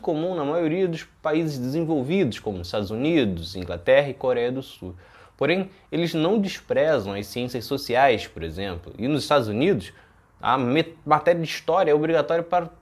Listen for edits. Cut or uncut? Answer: uncut